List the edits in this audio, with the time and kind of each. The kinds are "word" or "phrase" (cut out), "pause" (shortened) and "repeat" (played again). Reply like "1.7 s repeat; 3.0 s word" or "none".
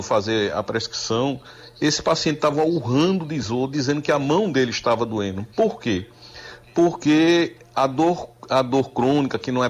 none